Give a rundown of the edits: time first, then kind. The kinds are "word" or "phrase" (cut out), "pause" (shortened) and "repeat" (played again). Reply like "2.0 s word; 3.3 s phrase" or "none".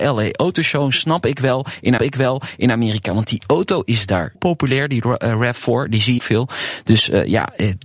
2.0 s repeat; 4.3 s word; 6.2 s phrase